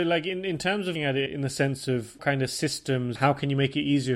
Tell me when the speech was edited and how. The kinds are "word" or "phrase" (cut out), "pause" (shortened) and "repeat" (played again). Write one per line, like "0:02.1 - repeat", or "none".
0:01.0 - word
0:01.3 - word
0:02.2 - word
0:03.2 - word